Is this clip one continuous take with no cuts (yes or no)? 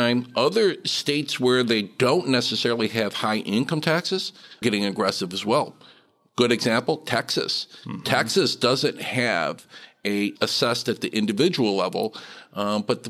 no